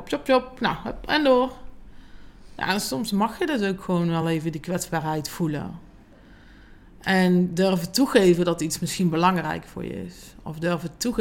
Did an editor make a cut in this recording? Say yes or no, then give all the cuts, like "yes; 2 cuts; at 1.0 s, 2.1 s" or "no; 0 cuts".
no; 0 cuts